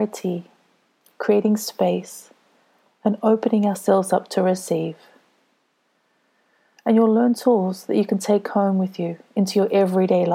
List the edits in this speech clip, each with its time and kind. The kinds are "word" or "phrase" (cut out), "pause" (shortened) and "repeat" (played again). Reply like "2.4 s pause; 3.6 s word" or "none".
none